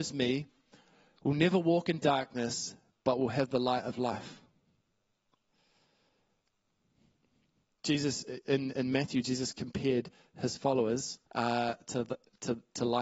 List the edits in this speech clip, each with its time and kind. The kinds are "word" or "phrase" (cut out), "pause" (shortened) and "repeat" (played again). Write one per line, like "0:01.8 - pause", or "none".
0:11.2 - pause